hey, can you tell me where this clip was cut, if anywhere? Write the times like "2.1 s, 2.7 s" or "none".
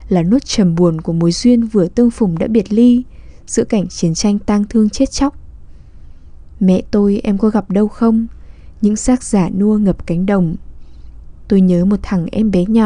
none